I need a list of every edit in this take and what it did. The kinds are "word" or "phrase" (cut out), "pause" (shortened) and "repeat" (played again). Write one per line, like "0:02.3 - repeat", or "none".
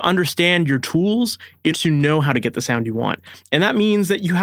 0:01.7 - word